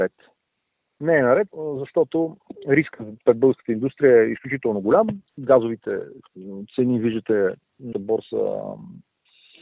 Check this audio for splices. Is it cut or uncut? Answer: cut